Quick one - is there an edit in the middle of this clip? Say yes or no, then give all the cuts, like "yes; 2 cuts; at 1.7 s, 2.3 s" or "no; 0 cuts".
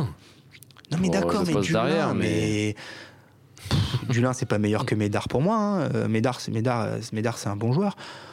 no; 0 cuts